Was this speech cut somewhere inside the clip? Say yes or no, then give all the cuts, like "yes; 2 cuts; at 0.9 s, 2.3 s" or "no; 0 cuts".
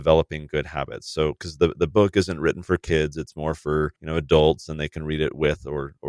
yes; 1 cut; at 4.0 s